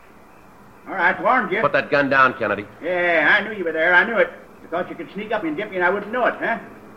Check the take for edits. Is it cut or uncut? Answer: cut